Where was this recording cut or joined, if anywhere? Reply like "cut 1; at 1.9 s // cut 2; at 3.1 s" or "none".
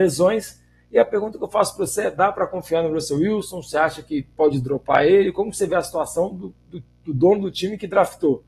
none